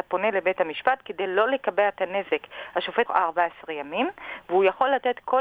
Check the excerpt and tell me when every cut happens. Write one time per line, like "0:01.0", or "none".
0:03.1